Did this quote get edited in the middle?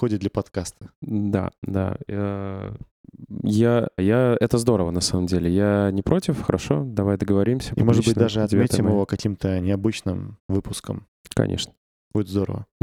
yes; 1 cut; at 4.0 s

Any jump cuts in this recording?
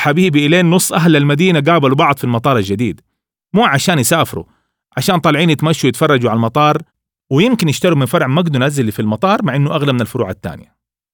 no; 0 cuts

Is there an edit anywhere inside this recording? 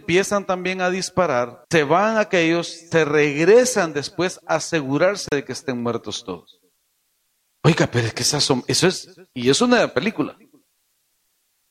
yes; 1 cut; at 1.6 s

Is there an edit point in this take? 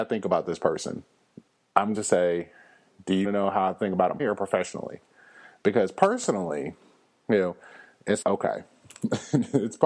yes; 4 cuts; at 1.9 s, 3.2 s, 4.2 s, 8.2 s

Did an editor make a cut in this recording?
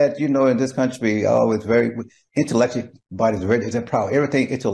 no; 0 cuts

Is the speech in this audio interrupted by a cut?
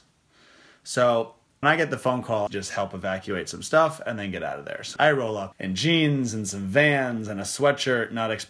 yes; 4 cuts; at 1.6 s, 2.5 s, 5.0 s, 5.5 s

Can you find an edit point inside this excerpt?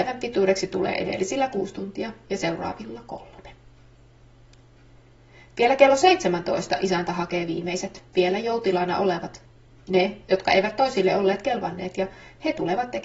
no; 0 cuts

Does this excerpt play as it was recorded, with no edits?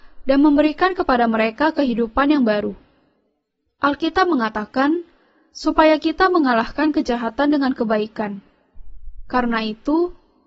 yes; 0 cuts

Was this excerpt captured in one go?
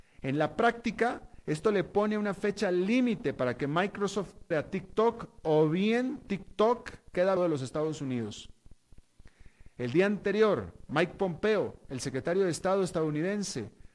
no; 2 cuts; at 4.5 s, 7.4 s

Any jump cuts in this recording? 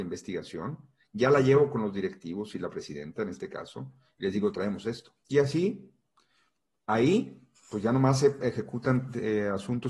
no; 0 cuts

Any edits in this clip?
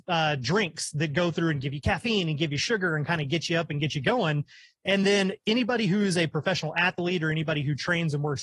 no; 0 cuts

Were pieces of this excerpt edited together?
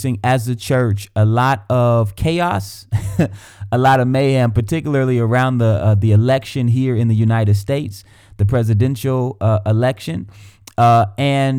no; 0 cuts

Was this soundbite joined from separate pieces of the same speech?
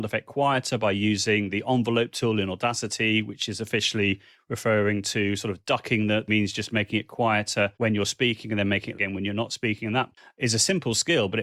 yes; 3 cuts; at 6.3 s, 7.7 s, 8.9 s

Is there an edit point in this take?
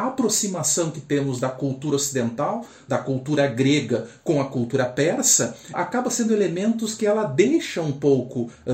yes; 1 cut; at 5.7 s

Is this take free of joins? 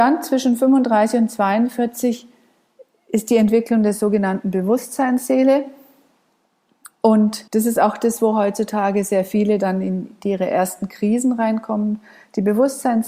no; 1 cut; at 7.5 s

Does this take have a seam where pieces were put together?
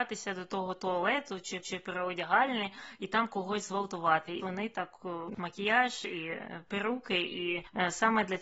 yes; 3 cuts; at 1.6 s, 4.4 s, 5.4 s

